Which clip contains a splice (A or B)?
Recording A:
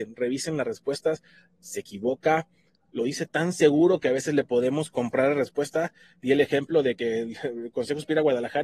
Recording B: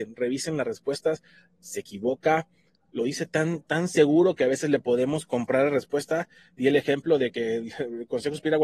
A